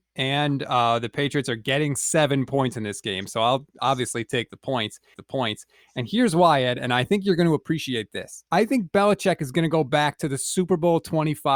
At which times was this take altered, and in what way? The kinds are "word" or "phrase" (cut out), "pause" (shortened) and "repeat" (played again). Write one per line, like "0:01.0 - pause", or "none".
0:05.1 - repeat
0:08.5 - pause